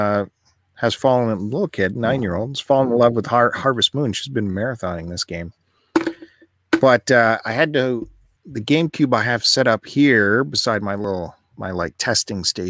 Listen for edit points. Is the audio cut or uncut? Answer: cut